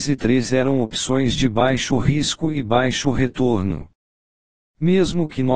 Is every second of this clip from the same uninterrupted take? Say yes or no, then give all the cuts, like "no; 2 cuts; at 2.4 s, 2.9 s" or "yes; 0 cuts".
yes; 0 cuts